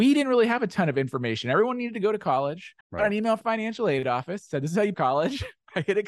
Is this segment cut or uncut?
cut